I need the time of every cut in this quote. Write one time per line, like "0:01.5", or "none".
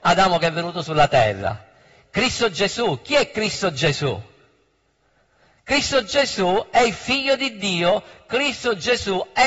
none

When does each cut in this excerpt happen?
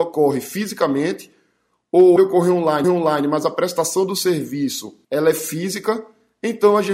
0:02.2
0:02.8
0:05.0

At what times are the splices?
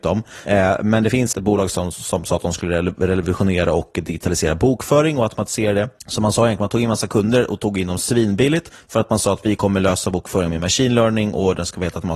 0:01.3
0:06.0

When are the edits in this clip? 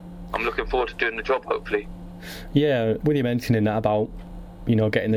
0:03.0

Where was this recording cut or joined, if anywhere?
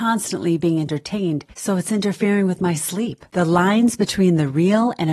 0:01.5
0:03.3

